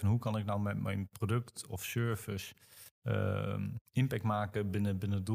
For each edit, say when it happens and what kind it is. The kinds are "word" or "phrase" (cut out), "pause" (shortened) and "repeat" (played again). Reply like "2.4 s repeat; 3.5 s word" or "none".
3.8 s pause